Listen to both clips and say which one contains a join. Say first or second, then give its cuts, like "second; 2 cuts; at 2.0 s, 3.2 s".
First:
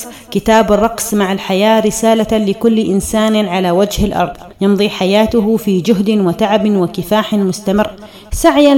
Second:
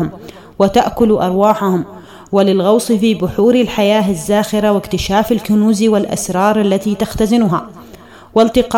first; 1 cut; at 4.5 s